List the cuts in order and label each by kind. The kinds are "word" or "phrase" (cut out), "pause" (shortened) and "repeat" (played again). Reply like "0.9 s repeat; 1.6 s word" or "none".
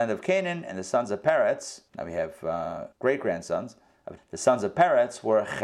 1.9 s pause; 2.9 s pause; 4.2 s word